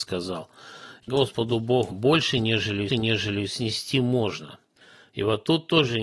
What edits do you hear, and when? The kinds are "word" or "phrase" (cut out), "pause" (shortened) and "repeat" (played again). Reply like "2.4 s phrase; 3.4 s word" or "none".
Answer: 1.1 s phrase; 1.9 s phrase; 2.9 s repeat